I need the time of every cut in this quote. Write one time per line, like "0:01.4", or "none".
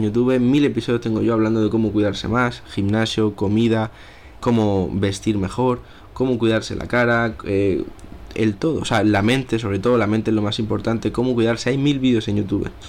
0:04.4